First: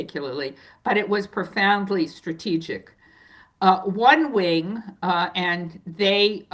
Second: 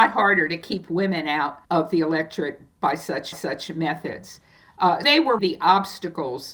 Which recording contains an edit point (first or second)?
second